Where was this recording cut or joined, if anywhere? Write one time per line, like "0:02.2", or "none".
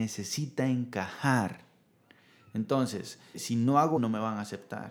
0:03.3
0:04.0